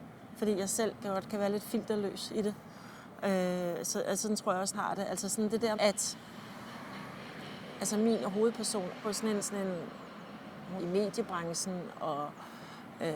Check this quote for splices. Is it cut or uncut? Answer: cut